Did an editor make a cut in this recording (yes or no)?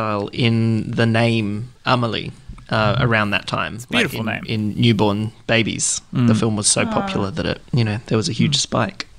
yes